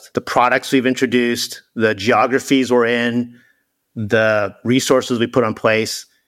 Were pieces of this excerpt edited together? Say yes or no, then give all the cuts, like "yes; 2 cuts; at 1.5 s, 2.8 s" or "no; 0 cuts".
no; 0 cuts